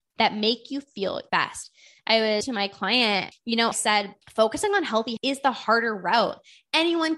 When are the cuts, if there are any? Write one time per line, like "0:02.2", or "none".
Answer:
0:01.3
0:02.4
0:03.3
0:03.7
0:04.2
0:05.2